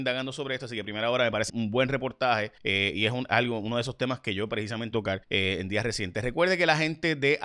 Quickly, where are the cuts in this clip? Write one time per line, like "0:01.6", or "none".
0:01.5
0:02.6
0:04.9
0:05.2